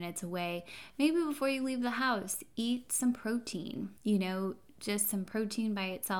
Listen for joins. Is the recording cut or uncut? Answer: cut